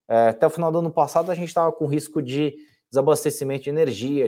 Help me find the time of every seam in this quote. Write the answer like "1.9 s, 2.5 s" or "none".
none